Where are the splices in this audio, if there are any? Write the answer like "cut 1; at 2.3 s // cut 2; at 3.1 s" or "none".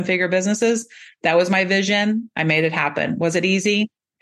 none